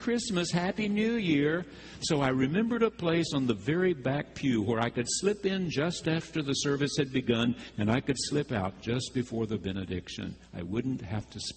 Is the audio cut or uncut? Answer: uncut